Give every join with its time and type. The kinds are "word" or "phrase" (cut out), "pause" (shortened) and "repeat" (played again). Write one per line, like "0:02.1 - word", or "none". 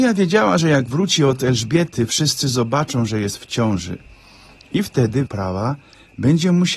0:05.3 - word